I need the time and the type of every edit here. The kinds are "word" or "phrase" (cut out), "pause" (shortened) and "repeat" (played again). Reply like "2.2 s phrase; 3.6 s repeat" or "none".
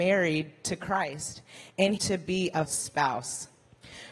2.0 s phrase; 2.6 s word